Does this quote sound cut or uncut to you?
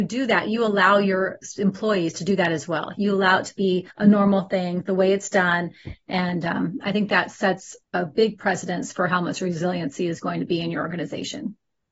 cut